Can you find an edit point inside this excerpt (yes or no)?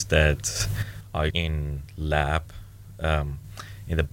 yes